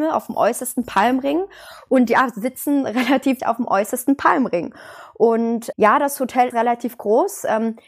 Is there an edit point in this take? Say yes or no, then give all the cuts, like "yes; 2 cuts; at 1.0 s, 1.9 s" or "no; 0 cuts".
yes; 3 cuts; at 3.4 s, 5.7 s, 6.5 s